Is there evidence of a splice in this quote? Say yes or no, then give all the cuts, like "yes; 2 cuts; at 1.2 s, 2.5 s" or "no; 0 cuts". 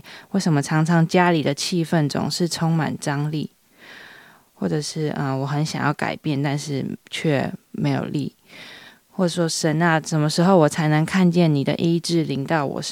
no; 0 cuts